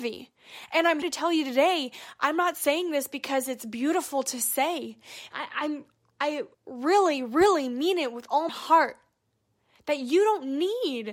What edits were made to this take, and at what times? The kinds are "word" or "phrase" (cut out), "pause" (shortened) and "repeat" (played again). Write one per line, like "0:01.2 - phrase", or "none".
0:01.0 - word
0:06.5 - pause
0:08.5 - word